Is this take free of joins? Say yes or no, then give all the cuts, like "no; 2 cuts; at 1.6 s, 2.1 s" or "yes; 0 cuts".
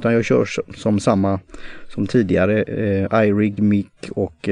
yes; 0 cuts